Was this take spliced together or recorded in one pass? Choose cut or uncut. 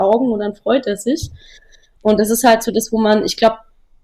uncut